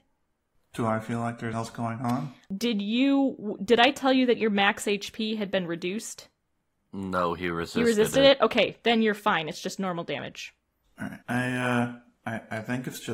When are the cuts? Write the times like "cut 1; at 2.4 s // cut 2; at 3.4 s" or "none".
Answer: cut 1; at 1.5 s // cut 2; at 11.2 s